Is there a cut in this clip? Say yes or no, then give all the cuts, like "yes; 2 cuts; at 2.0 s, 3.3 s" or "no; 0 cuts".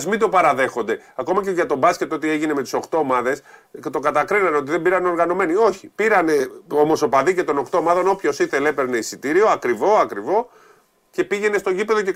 no; 0 cuts